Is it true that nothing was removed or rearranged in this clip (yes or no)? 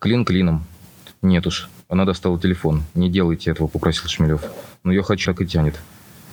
no